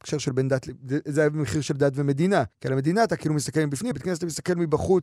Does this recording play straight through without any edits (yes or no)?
no